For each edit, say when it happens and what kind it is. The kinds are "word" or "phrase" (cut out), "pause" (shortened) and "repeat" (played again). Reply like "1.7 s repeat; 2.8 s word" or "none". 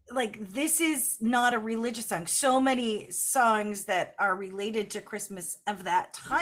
none